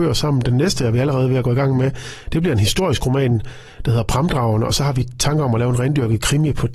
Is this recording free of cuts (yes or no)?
yes